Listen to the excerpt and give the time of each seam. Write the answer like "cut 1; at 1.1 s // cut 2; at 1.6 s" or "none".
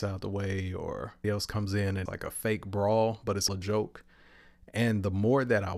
cut 1; at 1.2 s // cut 2; at 2.1 s // cut 3; at 3.5 s